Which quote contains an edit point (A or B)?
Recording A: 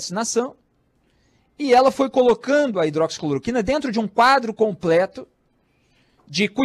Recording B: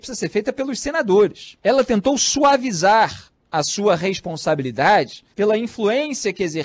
B